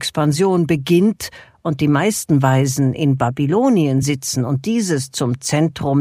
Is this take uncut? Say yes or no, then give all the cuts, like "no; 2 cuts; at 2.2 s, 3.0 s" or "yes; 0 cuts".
yes; 0 cuts